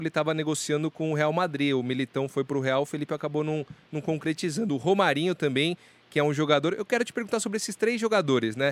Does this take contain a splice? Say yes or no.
no